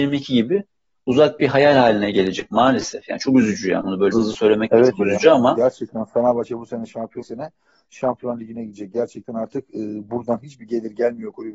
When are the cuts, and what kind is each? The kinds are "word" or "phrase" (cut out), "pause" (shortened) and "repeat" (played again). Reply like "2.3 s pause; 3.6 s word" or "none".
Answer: 4.1 s word; 7.2 s phrase